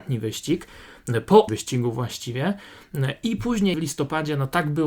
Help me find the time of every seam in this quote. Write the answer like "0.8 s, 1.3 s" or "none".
1.5 s, 3.7 s